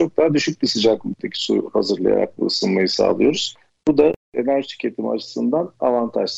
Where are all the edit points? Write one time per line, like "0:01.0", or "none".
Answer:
none